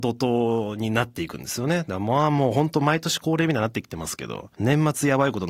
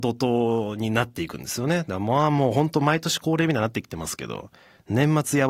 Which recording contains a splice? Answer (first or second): first